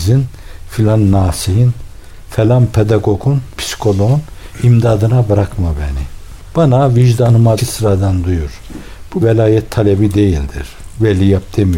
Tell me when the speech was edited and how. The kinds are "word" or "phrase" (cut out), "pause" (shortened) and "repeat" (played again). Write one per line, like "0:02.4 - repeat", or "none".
0:03.6 - word
0:07.6 - phrase
0:09.2 - word